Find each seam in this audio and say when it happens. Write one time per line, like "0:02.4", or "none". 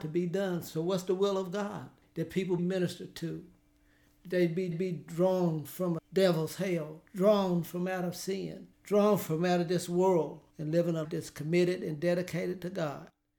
0:02.0
0:02.6
0:04.7
0:06.0
0:07.1
0:08.7
0:10.5
0:11.0

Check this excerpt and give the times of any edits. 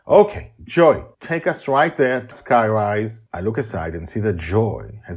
0:01.1
0:02.3
0:03.3

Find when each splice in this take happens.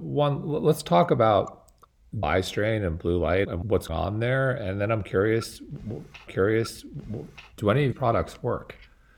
0:02.2
0:03.4
0:03.9
0:06.3
0:07.9

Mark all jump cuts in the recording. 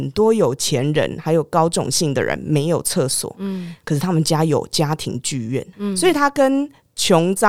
0:05.7

